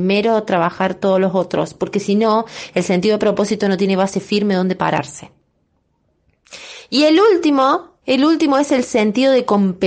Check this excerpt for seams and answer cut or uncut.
cut